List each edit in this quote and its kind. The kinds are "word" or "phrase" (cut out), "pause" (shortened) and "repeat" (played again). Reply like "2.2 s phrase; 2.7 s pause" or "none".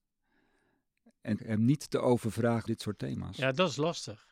1.4 s word; 2.7 s word